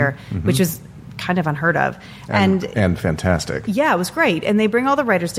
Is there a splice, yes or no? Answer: no